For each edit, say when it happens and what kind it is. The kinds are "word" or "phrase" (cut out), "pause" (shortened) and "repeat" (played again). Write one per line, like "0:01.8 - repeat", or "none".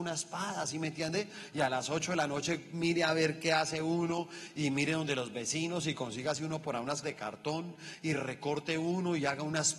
0:07.0 - word